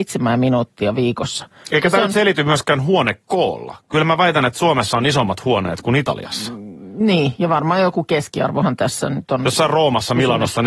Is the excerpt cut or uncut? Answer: uncut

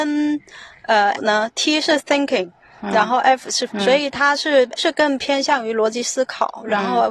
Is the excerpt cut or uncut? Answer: cut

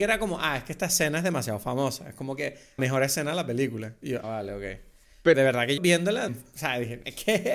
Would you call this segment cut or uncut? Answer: cut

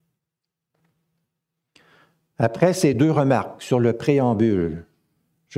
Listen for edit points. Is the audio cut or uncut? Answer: uncut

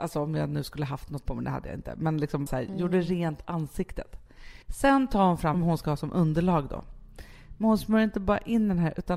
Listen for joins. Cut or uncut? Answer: cut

